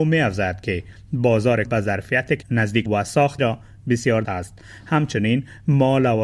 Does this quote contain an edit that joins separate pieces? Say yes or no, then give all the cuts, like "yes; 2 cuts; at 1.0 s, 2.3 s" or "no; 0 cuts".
yes; 5 cuts; at 1.6 s, 2.4 s, 2.9 s, 3.4 s, 4.2 s